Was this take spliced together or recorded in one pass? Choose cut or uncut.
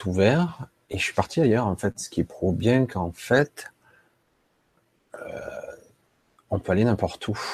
uncut